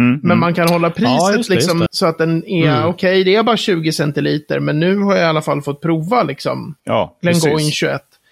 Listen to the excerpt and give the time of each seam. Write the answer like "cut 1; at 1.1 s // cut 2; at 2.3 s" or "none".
cut 1; at 1.9 s